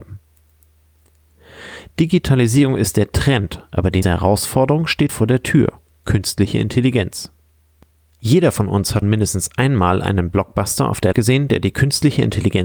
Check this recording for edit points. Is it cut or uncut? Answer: cut